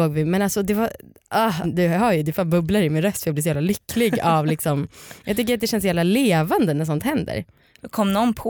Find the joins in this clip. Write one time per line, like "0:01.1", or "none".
0:01.6

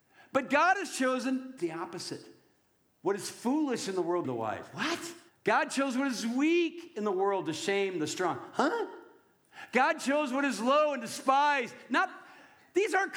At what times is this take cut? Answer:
0:01.6
0:04.2
0:05.3

